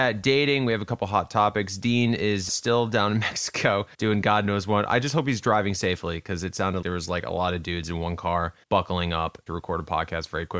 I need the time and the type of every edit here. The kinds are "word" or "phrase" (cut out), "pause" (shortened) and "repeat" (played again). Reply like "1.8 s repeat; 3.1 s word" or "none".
2.5 s word; 3.9 s pause; 6.8 s word; 8.6 s pause; 9.5 s phrase